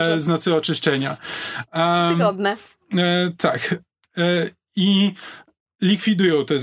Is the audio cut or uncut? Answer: uncut